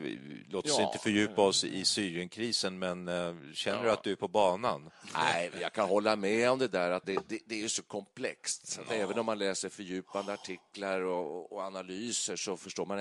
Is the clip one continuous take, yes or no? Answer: no